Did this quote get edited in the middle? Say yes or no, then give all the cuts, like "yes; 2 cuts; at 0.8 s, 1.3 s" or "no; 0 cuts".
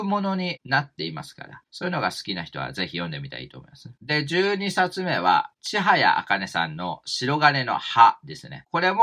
no; 0 cuts